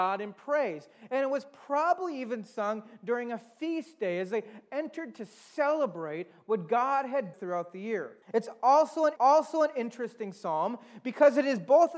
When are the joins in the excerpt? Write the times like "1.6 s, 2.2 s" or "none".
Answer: 7.3 s, 8.2 s, 9.2 s

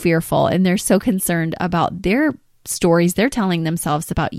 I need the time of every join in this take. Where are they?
none

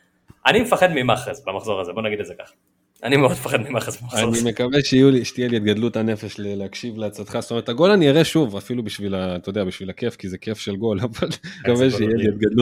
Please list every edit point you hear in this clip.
11.6 s

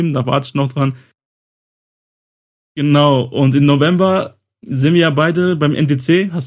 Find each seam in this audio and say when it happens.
none

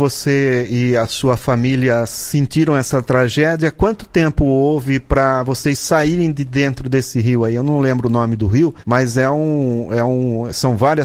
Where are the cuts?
8.8 s

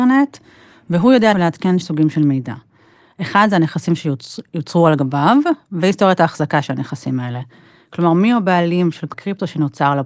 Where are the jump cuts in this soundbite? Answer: 1.3 s, 1.8 s, 9.1 s

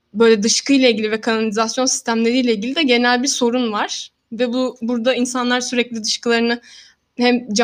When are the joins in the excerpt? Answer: none

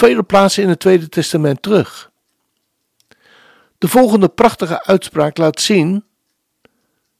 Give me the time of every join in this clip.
none

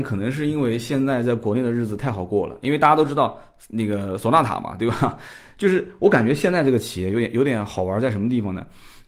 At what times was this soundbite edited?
none

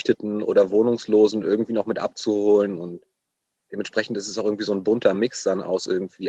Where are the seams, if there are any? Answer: none

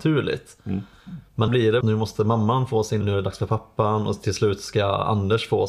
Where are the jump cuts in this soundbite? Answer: 1.5 s, 1.8 s, 3.0 s

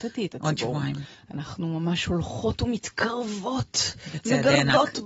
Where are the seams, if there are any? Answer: 1.1 s

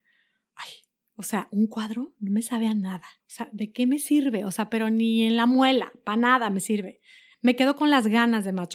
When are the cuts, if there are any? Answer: 3.2 s

